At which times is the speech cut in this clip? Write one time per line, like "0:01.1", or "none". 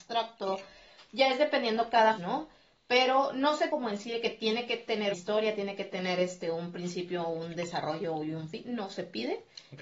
0:02.2
0:03.7
0:05.1